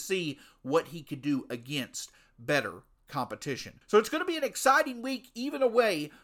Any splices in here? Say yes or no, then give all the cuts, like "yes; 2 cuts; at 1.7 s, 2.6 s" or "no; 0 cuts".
yes; 1 cut; at 3.8 s